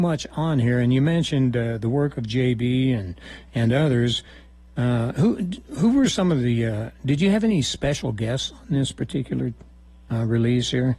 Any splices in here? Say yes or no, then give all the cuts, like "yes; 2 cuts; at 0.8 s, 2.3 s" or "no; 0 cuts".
no; 0 cuts